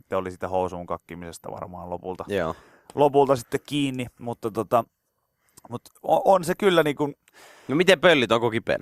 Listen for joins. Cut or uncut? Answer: uncut